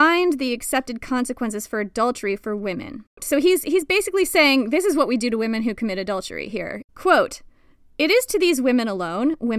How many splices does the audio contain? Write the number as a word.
zero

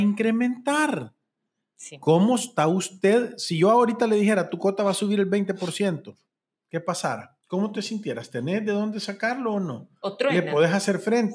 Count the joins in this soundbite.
one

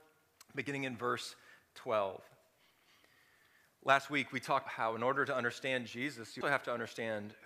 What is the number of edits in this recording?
two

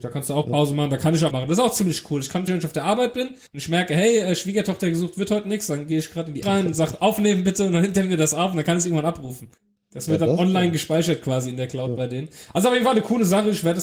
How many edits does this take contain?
five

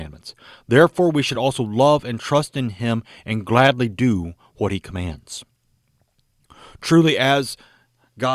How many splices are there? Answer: zero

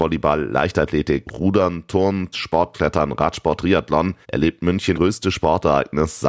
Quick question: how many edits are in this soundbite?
five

